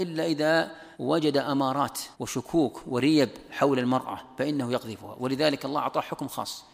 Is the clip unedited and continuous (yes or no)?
no